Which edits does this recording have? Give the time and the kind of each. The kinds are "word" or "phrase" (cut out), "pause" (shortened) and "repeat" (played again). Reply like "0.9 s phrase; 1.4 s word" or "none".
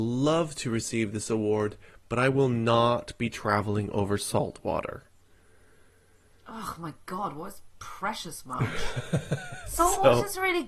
none

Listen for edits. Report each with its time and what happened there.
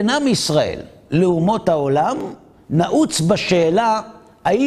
none

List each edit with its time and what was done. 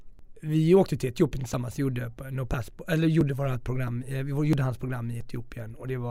none

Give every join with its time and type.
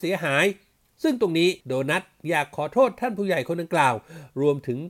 1.6 s pause

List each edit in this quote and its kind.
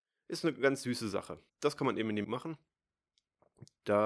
1.5 s pause; 2.2 s word

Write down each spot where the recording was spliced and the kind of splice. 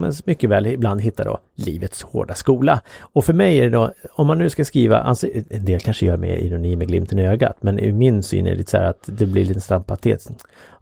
none

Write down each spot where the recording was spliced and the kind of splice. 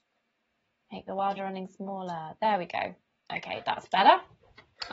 1.4 s word; 3.2 s pause

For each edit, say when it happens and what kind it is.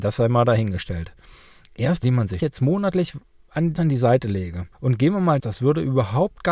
2.0 s word; 2.4 s phrase; 3.8 s word; 4.7 s pause; 5.4 s phrase

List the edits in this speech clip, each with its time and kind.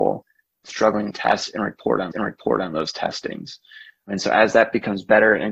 1.1 s phrase; 2.1 s repeat

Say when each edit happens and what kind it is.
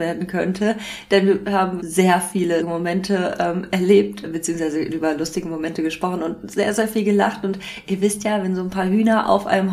1.8 s word; 2.6 s word

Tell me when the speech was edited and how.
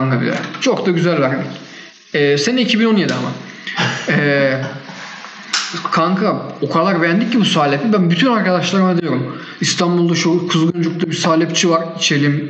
none

